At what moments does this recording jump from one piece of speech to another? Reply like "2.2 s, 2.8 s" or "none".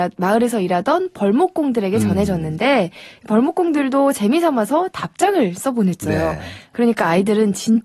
none